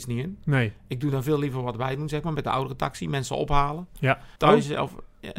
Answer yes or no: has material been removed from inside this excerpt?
yes